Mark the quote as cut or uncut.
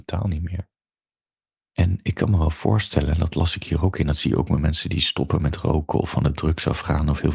uncut